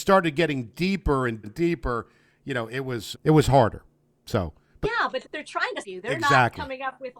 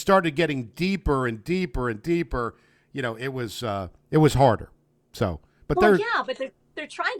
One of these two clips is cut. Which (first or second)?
first